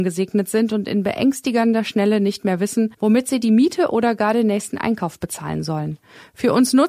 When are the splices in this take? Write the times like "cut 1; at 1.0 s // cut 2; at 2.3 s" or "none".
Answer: cut 1; at 2.9 s